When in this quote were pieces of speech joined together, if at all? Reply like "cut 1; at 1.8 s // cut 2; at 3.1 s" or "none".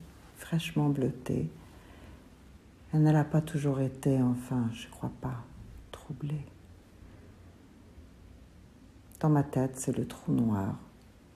none